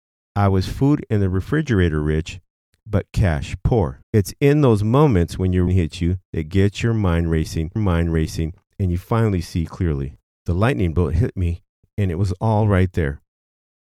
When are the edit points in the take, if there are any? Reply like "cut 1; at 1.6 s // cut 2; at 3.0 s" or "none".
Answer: cut 1; at 4.0 s // cut 2; at 5.7 s // cut 3; at 7.8 s